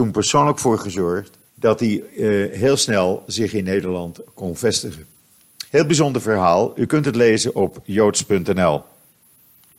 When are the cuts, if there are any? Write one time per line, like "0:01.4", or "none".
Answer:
0:01.5
0:05.7